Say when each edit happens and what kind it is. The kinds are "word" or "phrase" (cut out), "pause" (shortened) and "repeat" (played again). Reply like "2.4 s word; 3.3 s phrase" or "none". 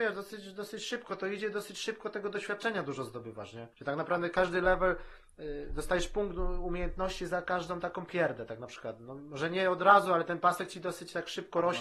3.7 s pause

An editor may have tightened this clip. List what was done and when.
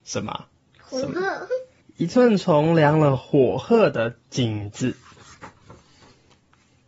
1.8 s pause

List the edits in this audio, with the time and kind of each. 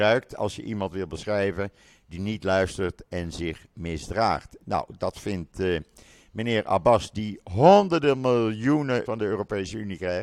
9.1 s word

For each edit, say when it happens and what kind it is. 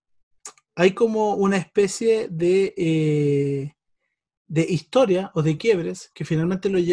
none

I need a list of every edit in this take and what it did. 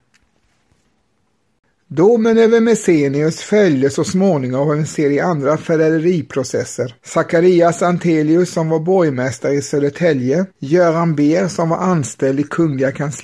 7.0 s pause; 10.5 s pause

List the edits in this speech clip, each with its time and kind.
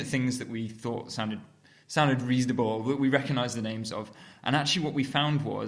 none

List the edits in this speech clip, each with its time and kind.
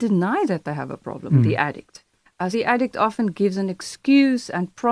2.5 s word

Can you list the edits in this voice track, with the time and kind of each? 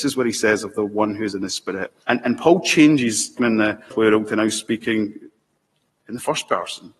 2.0 s pause; 3.4 s phrase; 3.9 s phrase

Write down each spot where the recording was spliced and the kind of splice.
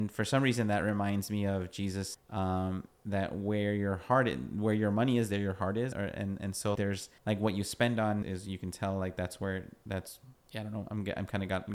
2.1 s word; 5.9 s word; 6.8 s word; 7.2 s pause; 8.2 s word; 10.3 s pause

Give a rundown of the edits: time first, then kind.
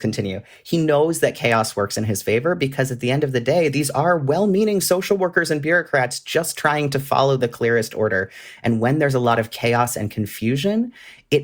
none

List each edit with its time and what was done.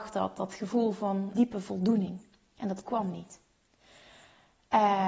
1.3 s word

